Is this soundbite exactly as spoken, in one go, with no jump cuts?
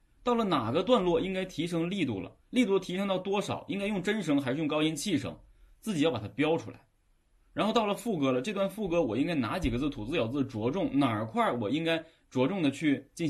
yes; 0 cuts

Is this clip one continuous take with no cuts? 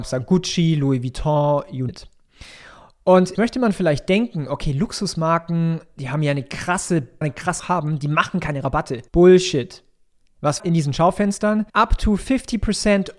no; 7 cuts; at 1.9 s, 3.3 s, 7.2 s, 7.6 s, 9.1 s, 10.6 s, 11.7 s

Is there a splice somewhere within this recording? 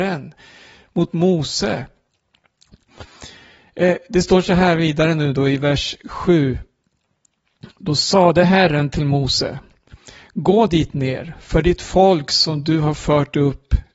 no; 0 cuts

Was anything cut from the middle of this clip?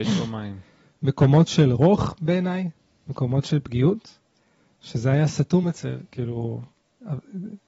no; 0 cuts

